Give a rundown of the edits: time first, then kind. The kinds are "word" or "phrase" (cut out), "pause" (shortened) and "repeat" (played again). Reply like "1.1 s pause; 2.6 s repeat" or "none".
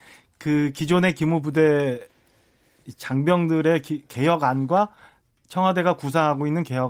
none